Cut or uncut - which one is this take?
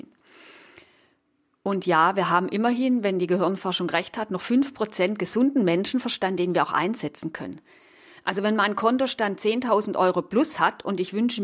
uncut